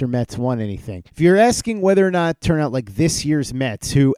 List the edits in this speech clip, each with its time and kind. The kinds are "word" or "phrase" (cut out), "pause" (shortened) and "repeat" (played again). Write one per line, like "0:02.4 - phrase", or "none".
0:01.1 - pause
0:02.4 - phrase